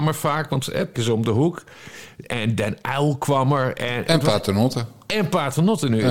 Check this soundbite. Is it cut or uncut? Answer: cut